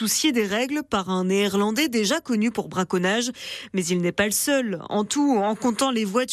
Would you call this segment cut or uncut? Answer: uncut